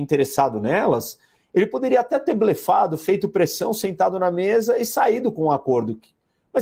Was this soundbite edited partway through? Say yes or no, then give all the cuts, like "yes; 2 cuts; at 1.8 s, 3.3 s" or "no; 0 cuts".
no; 0 cuts